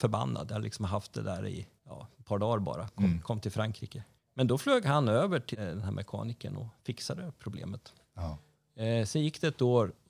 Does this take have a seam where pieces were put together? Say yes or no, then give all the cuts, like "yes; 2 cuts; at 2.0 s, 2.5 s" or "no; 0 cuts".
yes; 3 cuts; at 1.8 s, 4.2 s, 5.5 s